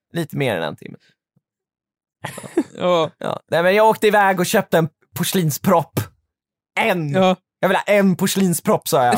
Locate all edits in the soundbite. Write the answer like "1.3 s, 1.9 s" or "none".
none